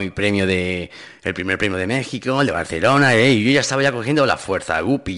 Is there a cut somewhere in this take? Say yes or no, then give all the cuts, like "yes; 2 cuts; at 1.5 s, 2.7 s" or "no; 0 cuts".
no; 0 cuts